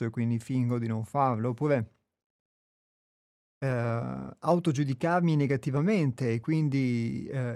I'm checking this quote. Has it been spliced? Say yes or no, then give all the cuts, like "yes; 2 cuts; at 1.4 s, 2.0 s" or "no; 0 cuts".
no; 0 cuts